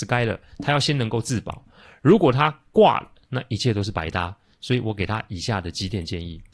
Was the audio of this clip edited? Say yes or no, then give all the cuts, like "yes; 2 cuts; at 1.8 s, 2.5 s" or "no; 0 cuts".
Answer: no; 0 cuts